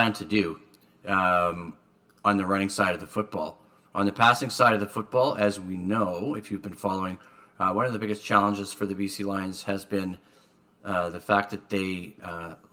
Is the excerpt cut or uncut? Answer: uncut